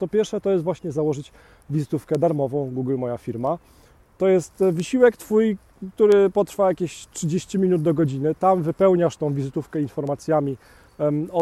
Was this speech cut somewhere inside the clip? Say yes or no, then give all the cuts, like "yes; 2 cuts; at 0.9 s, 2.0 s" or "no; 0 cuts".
no; 0 cuts